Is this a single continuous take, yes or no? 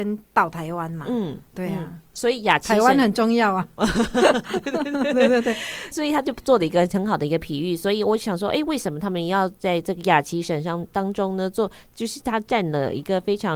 no